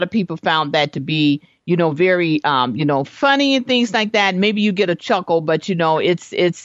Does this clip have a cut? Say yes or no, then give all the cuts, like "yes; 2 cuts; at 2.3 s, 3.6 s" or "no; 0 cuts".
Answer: no; 0 cuts